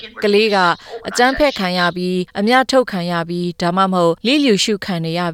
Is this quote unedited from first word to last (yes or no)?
no